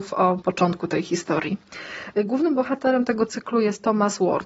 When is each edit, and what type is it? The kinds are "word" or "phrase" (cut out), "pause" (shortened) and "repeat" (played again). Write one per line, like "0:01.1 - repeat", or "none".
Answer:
none